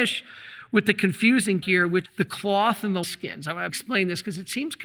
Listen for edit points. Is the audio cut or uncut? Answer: cut